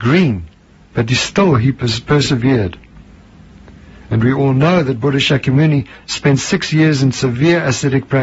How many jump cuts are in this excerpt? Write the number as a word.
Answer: zero